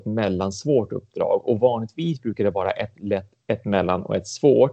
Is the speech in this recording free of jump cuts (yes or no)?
yes